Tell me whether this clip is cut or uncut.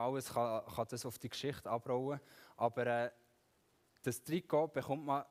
uncut